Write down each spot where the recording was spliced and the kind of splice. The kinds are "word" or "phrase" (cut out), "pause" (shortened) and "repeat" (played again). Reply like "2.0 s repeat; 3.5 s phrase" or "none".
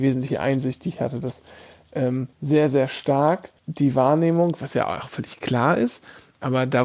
2.3 s pause; 3.6 s pause